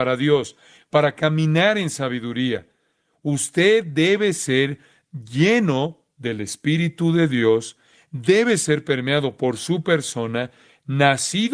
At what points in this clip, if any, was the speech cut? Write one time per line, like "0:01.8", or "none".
none